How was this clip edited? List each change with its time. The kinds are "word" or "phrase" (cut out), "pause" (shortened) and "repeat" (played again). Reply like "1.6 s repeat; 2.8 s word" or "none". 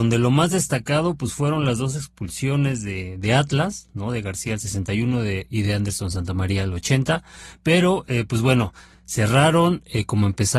none